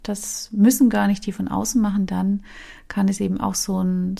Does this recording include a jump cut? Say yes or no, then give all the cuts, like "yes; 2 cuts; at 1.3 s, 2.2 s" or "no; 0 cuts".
no; 0 cuts